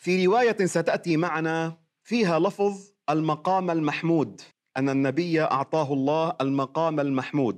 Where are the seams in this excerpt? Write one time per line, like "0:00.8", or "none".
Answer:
0:04.5